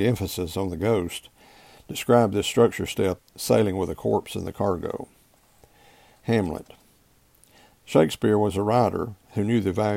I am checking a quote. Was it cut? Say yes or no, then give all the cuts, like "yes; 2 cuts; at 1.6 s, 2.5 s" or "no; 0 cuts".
yes; 1 cut; at 3.2 s